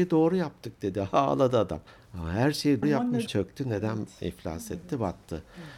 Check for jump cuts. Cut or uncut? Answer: cut